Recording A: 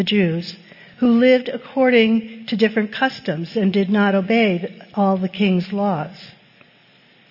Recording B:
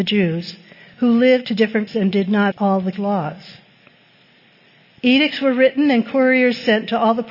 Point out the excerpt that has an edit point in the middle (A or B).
B